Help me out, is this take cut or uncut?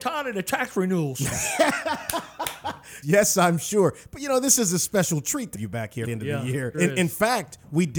cut